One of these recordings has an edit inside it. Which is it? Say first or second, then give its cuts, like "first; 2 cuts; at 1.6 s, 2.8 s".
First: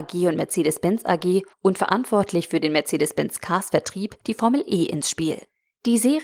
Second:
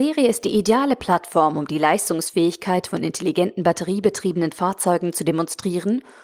first; 2 cuts; at 1.5 s, 4.2 s